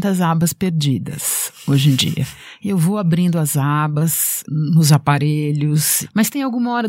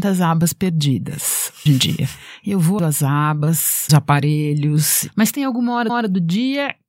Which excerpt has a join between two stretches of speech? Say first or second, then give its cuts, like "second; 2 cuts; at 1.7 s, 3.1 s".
second; 4 cuts; at 1.7 s, 2.8 s, 3.9 s, 5.9 s